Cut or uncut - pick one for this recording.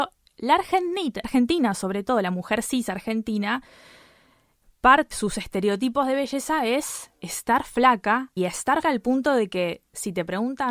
cut